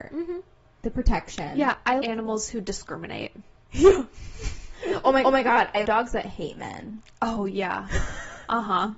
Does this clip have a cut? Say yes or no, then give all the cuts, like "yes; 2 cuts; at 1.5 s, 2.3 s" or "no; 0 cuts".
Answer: yes; 3 cuts; at 2.0 s, 5.2 s, 5.9 s